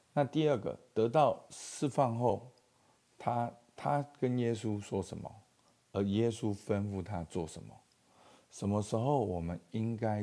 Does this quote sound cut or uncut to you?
uncut